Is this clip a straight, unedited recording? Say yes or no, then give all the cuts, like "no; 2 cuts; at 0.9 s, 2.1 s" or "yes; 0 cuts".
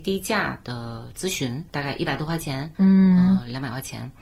no; 2 cuts; at 1.7 s, 2.7 s